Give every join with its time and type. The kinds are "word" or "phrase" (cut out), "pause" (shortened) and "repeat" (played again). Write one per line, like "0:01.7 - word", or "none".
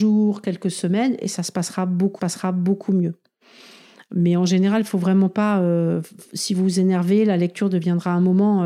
0:02.2 - repeat